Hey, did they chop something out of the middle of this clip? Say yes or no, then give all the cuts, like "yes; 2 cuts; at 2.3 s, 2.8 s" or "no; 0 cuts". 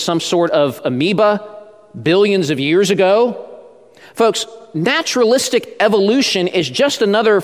no; 0 cuts